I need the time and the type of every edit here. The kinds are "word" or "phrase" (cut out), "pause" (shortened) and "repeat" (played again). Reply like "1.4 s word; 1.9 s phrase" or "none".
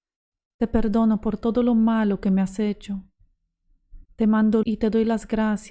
4.0 s pause; 4.6 s word